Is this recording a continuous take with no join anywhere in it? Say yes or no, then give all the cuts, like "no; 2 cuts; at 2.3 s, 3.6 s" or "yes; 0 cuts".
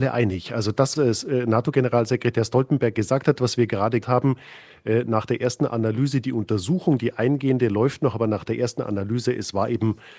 no; 2 cuts; at 0.9 s, 4.0 s